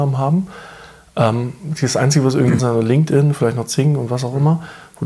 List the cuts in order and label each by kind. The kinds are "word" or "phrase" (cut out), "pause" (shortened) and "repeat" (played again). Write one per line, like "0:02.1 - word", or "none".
0:02.6 - word

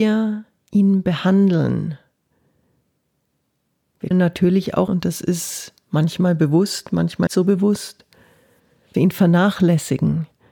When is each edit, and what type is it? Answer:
0:04.1 - word
0:04.9 - word
0:07.3 - word
0:08.9 - word

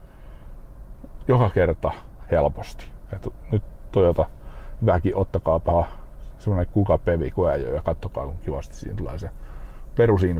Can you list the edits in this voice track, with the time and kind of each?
none

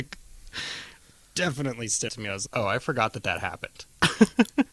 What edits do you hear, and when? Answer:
0:02.1 - word
0:02.5 - word

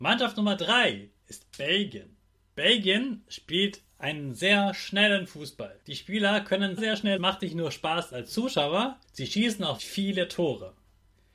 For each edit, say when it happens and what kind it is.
0:02.3 - pause
0:03.9 - pause
0:05.8 - pause
0:06.8 - word
0:07.2 - phrase
0:09.0 - pause
0:09.8 - word

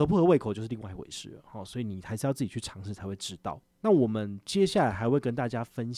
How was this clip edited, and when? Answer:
0:03.7 - pause

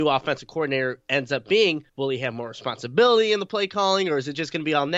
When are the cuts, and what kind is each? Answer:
0:01.9 - pause

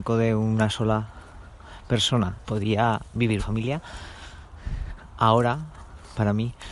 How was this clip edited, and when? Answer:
0:02.4 - word
0:03.4 - word

